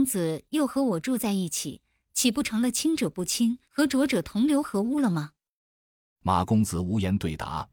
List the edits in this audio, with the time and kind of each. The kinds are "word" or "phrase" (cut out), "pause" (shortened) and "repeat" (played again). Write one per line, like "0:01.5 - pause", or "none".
0:03.6 - pause